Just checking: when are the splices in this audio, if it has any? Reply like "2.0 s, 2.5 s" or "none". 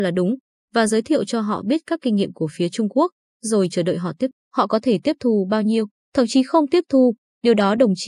4.3 s